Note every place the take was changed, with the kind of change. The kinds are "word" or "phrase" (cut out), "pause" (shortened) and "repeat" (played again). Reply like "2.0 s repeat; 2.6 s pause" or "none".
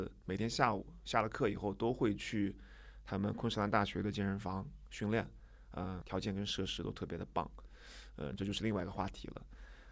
6.0 s word